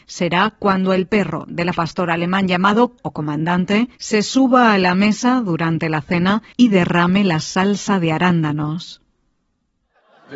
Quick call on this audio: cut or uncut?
cut